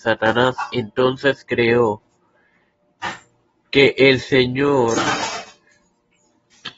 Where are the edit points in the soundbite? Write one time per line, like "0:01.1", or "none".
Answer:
0:03.4